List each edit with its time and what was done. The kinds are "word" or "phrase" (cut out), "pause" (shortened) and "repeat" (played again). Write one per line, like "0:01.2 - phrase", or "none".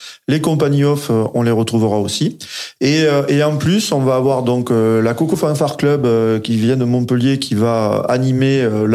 none

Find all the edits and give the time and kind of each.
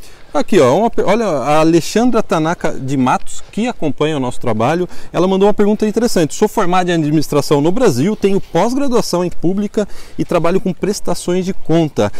0:09.3 - word

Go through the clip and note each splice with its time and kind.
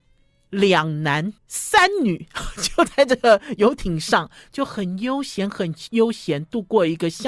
0:01.4 - pause

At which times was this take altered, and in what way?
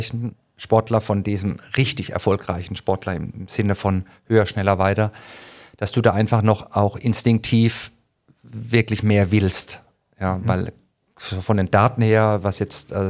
none

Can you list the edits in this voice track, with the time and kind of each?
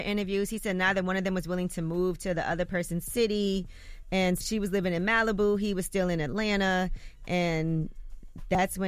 0:04.4 - word

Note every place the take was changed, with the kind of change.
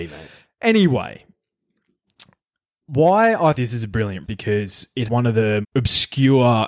0:03.5 - word
0:04.2 - word
0:05.1 - word
0:05.6 - word

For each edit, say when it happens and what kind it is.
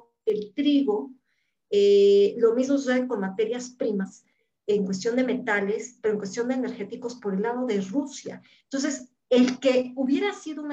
none

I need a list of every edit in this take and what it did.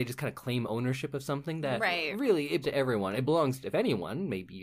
0:02.6 - word

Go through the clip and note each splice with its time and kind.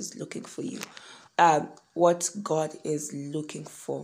0:01.3 - pause

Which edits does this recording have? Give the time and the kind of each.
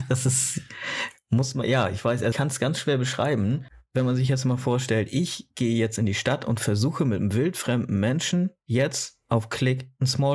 0:02.3 - word

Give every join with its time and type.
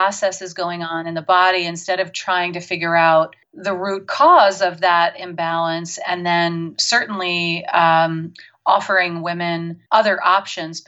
0:03.4 - pause
0:09.9 - pause

